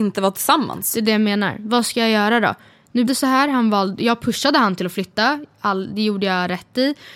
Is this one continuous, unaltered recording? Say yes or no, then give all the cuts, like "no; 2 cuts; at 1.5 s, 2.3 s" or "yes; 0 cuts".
no; 1 cut; at 3.1 s